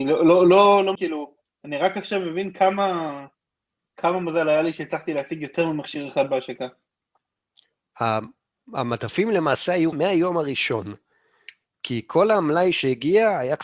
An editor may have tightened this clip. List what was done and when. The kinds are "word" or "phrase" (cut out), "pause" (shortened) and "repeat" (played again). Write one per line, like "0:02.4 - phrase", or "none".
0:00.9 - word
0:09.9 - word